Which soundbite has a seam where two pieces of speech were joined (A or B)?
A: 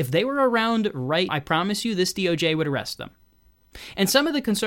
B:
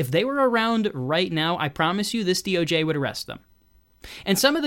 A